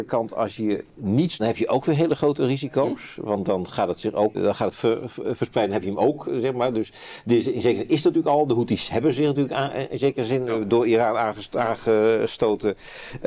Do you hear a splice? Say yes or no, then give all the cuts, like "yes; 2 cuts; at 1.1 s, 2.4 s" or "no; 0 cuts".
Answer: yes; 4 cuts; at 1.4 s, 4.3 s, 4.7 s, 10.5 s